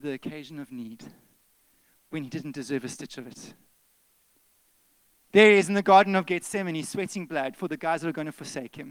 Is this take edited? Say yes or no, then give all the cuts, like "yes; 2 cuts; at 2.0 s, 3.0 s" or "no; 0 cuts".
no; 0 cuts